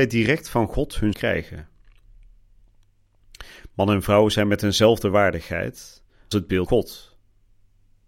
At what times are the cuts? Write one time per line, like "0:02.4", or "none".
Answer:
0:01.1
0:06.3
0:06.7